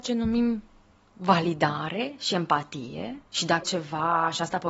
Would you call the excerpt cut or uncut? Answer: cut